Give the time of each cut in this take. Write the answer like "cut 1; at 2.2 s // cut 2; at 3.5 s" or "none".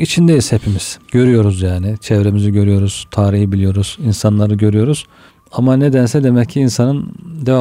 cut 1; at 1.0 s // cut 2; at 5.3 s